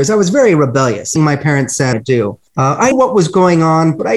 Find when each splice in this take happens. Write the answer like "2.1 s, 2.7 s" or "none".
1.2 s, 1.9 s, 2.5 s, 2.9 s